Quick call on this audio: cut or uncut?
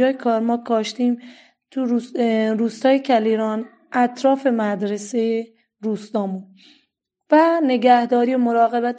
uncut